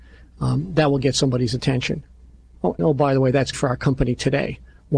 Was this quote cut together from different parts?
yes; 2 cuts; at 2.8 s, 3.5 s

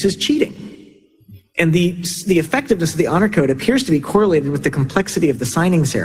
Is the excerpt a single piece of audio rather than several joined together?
yes; 0 cuts

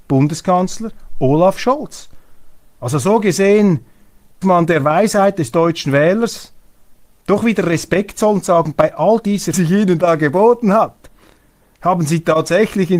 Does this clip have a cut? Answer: yes; 2 cuts; at 4.4 s, 9.5 s

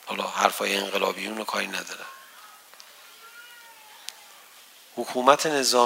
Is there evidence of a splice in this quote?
no; 0 cuts

